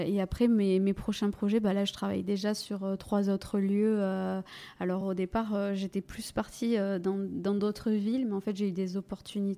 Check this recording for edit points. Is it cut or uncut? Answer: uncut